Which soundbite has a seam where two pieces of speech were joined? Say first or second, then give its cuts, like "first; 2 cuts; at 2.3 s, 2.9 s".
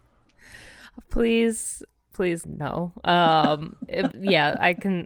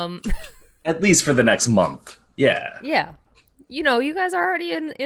first; 2 cuts; at 2.4 s, 4.1 s